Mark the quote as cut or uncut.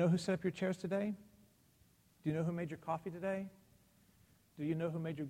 uncut